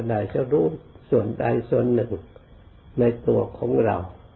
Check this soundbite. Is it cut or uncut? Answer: uncut